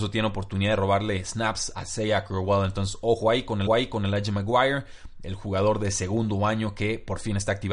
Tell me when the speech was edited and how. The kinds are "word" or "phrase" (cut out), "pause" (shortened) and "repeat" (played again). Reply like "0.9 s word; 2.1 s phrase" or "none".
1.7 s word; 3.7 s repeat